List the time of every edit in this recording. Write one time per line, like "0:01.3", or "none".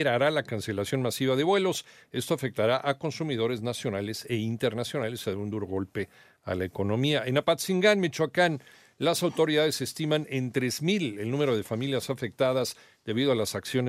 none